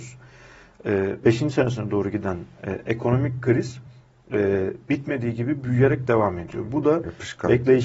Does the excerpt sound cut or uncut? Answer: uncut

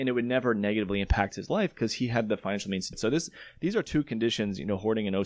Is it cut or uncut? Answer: cut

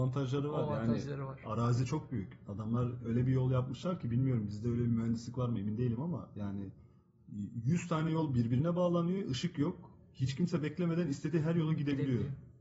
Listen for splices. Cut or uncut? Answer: uncut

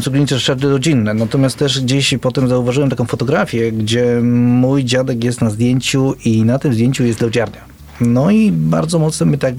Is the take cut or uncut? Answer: uncut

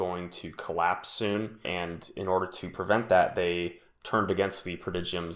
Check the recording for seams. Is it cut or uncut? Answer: cut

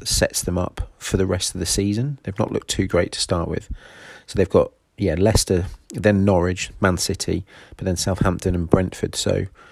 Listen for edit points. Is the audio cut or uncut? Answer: uncut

